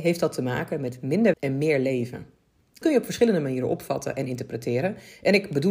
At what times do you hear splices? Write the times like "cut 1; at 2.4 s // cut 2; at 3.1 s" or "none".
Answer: cut 1; at 1.3 s // cut 2; at 2.8 s